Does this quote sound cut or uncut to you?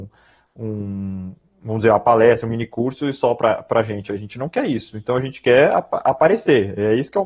uncut